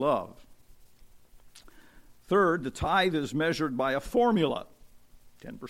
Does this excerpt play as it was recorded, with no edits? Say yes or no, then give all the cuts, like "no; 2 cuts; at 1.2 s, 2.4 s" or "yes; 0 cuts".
yes; 0 cuts